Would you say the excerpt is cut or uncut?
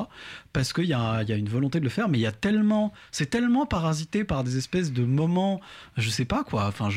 uncut